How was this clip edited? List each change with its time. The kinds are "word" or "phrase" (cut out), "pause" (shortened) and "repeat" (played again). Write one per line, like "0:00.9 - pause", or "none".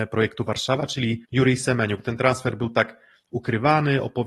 0:01.2 - pause